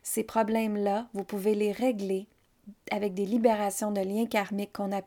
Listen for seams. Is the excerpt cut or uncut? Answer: uncut